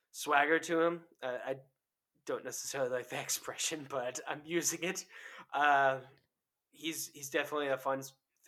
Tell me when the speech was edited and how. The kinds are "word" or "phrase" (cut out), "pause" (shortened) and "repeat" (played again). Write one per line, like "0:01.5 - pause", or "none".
none